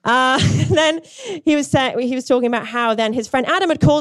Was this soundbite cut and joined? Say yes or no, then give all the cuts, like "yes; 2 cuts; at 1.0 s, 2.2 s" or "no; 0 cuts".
no; 0 cuts